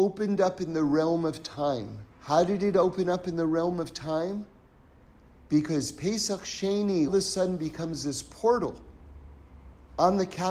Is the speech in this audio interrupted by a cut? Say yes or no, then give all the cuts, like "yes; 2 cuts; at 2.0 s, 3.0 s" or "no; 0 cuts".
yes; 2 cuts; at 2.1 s, 7.1 s